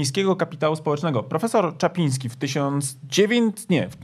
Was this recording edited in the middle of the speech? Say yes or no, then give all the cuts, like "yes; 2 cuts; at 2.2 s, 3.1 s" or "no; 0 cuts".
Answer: no; 0 cuts